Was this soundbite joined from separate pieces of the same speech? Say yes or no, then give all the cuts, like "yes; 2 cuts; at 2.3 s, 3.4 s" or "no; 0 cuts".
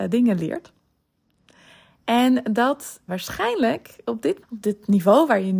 yes; 2 cuts; at 3.1 s, 4.4 s